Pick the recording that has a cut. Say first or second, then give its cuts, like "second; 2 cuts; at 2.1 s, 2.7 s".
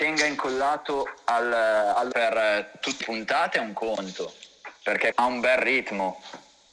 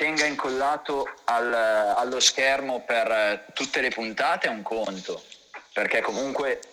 first; 3 cuts; at 2.1 s, 3.0 s, 5.1 s